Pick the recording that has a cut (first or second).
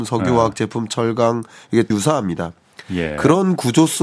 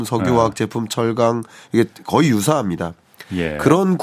first